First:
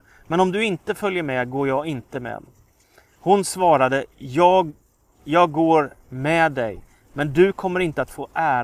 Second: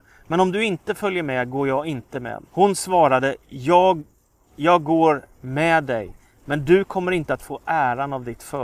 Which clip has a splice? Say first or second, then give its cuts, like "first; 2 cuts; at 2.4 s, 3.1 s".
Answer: second; 1 cut; at 2.5 s